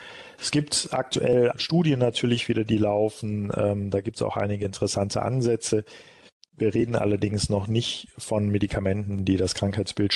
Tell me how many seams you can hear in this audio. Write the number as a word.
one